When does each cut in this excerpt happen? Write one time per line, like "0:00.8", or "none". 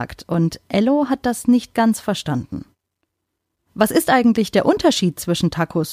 none